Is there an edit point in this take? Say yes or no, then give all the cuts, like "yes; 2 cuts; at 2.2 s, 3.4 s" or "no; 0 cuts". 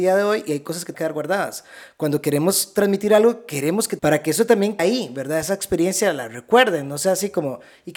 yes; 3 cuts; at 0.9 s, 4.0 s, 4.8 s